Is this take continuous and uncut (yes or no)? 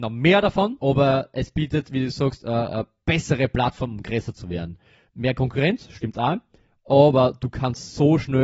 yes